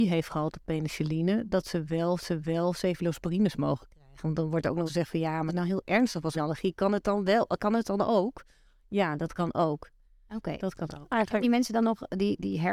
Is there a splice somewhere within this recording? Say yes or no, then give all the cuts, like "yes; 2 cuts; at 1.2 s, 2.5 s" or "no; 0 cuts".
yes; 5 cuts; at 2.2 s, 4.9 s, 5.5 s, 6.3 s, 11.4 s